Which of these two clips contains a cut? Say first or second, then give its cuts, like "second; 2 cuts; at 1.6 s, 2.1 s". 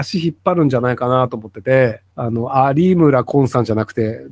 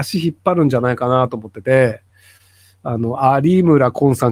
first; 1 cut; at 2.1 s